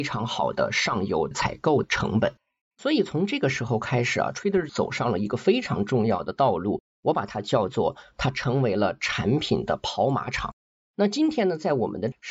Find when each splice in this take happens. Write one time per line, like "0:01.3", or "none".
0:04.7